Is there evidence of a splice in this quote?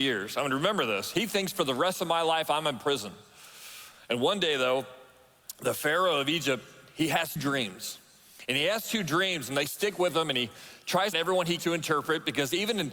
yes; 3 cuts; at 7.4 s, 11.1 s, 11.6 s

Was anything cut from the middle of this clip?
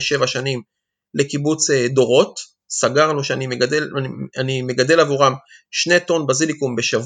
no; 0 cuts

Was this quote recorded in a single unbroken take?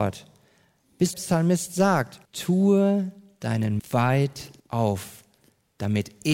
no; 4 cuts; at 1.1 s, 2.2 s, 3.8 s, 4.6 s

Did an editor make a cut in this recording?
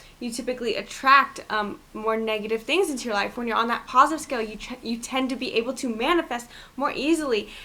no; 0 cuts

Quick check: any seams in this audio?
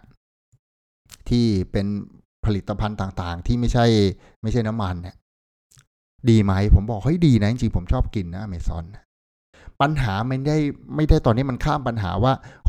no; 0 cuts

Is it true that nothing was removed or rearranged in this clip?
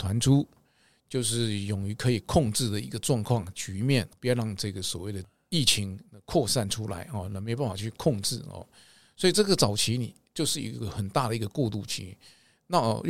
yes; 0 cuts

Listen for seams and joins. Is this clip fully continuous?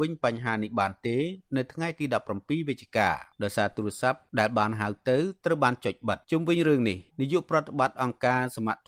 no; 3 cuts; at 3.3 s, 6.2 s, 7.1 s

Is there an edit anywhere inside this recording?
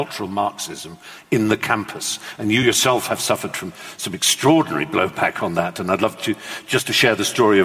no; 0 cuts

